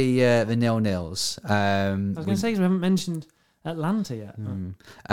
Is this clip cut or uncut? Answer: uncut